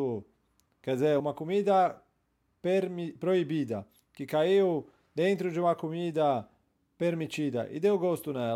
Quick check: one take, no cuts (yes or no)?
no